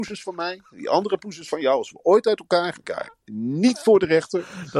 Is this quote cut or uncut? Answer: cut